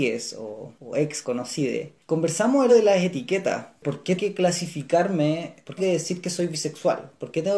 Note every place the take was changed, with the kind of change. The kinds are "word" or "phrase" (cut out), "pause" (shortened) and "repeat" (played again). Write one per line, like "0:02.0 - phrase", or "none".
0:01.2 - word
0:02.7 - word
0:04.2 - word
0:05.8 - word